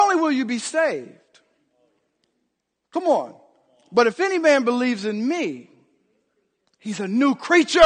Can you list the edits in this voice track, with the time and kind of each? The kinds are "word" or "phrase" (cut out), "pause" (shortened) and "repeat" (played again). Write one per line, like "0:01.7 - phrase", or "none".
none